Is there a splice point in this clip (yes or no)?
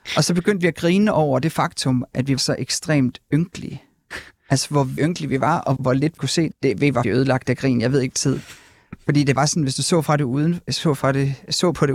yes